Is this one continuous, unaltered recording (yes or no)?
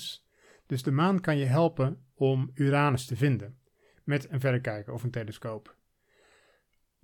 yes